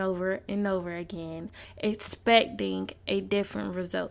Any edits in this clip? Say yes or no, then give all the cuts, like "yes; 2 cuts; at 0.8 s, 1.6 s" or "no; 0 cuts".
no; 0 cuts